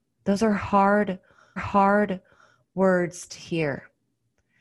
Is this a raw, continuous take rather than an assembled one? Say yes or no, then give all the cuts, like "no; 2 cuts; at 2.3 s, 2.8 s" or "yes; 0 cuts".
no; 1 cut; at 1.6 s